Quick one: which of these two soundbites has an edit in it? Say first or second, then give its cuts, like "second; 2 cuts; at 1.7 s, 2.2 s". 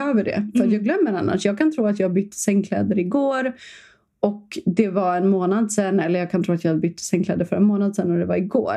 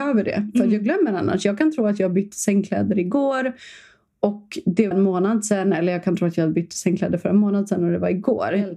second; 1 cut; at 4.9 s